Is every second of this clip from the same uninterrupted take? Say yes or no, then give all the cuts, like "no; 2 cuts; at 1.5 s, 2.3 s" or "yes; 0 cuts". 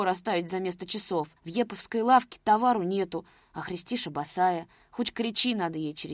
no; 1 cut; at 1.4 s